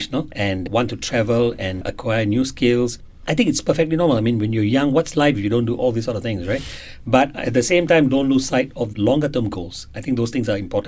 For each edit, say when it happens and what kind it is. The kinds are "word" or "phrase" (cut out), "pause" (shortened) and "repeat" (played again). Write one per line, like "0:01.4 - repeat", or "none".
0:08.9 - word